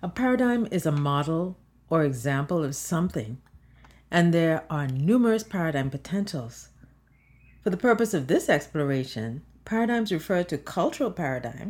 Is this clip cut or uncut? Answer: uncut